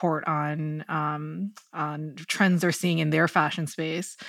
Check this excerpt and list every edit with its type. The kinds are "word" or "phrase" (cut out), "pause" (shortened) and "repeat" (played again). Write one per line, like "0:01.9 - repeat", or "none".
none